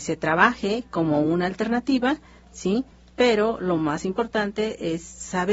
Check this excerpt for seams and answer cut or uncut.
uncut